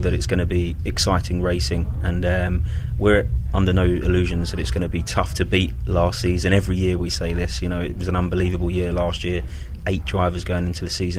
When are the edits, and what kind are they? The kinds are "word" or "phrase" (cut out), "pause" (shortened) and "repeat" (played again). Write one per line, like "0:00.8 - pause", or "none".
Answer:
none